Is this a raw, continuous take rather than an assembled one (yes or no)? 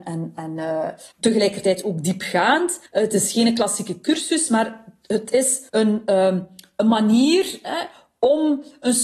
no